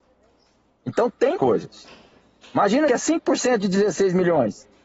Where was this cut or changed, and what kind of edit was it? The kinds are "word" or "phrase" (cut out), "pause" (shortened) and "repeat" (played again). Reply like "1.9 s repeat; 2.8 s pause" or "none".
1.4 s phrase; 2.9 s phrase